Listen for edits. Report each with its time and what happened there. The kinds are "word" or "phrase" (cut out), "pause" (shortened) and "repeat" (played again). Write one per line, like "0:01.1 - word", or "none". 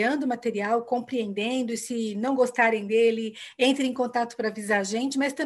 none